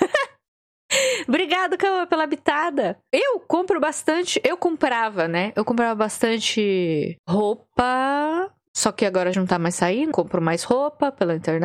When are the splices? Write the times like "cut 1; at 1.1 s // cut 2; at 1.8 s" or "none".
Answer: cut 1; at 9.3 s // cut 2; at 10.1 s